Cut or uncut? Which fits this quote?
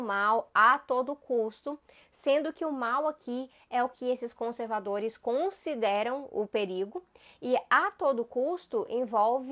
uncut